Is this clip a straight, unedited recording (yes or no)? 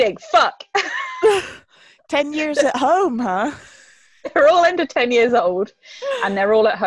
yes